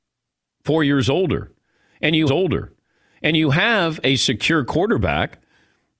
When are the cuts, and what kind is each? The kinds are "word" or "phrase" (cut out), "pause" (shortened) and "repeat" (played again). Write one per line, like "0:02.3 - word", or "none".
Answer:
0:02.3 - repeat

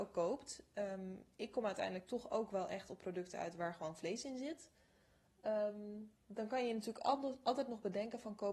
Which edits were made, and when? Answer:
none

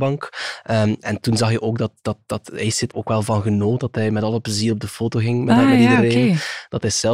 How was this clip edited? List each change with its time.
0:02.9 - word

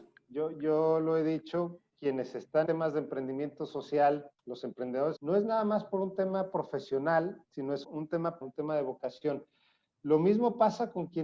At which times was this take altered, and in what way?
0:02.7 - word
0:04.4 - pause
0:05.2 - word
0:07.4 - pause
0:07.8 - word
0:08.4 - word

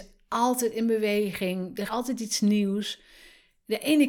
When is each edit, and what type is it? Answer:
0:01.9 - word

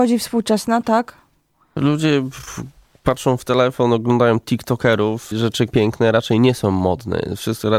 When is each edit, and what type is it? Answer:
0:05.3 - word
0:05.7 - phrase

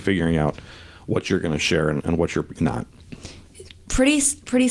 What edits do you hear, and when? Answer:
0:02.0 - word
0:02.6 - word

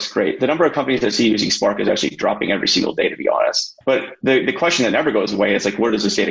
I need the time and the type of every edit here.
0:03.8 - word

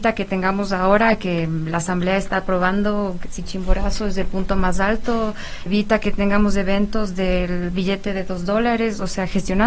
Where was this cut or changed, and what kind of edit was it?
0:05.7 - word

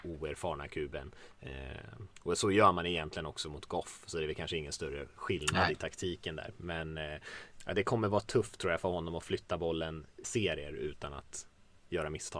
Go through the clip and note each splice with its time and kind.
0:07.6 - word
0:10.2 - word

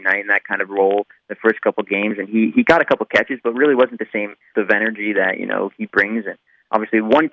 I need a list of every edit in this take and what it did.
0:04.5 - word

